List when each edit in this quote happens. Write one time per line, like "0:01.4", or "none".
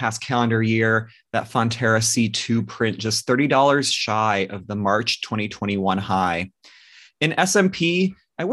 none